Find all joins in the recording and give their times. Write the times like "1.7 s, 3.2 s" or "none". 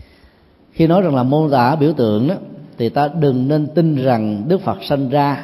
none